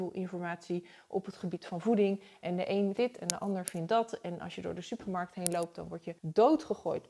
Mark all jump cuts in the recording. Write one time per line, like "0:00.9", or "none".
0:03.0
0:06.2